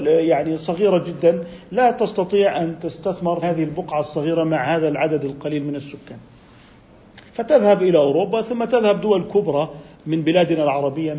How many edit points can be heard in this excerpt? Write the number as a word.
two